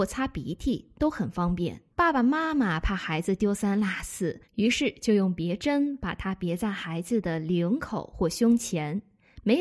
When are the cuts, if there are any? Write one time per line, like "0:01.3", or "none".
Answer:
0:01.9
0:04.4